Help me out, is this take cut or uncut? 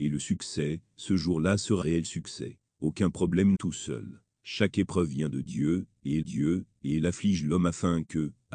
cut